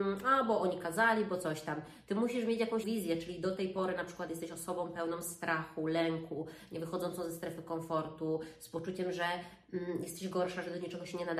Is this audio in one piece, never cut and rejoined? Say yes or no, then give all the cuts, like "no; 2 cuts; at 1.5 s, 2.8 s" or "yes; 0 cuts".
no; 1 cut; at 2.8 s